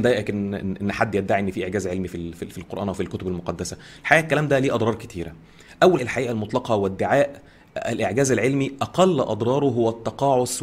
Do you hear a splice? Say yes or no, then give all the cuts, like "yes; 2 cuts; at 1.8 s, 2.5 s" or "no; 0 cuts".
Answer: yes; 1 cut; at 6.0 s